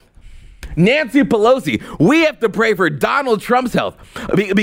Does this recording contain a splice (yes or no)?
no